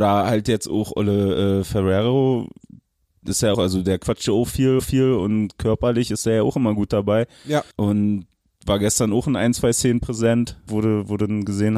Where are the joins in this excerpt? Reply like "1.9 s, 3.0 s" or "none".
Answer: 3.5 s, 4.8 s, 7.7 s, 10.7 s